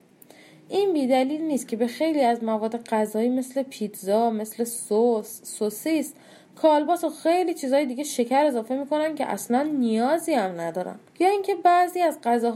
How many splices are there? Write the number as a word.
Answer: one